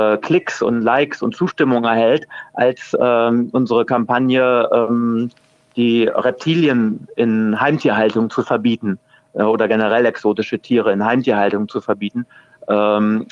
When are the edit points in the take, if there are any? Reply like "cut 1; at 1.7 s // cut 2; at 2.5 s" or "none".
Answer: none